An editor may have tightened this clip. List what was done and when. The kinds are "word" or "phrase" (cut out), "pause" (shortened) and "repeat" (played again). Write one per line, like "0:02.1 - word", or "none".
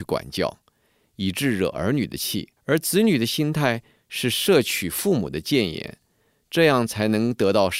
0:02.6 - pause